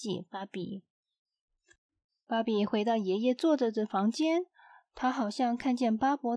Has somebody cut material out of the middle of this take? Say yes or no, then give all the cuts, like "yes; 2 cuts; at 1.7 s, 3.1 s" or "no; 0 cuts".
no; 0 cuts